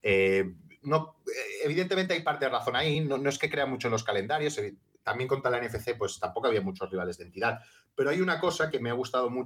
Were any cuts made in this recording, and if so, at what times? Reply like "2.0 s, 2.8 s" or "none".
none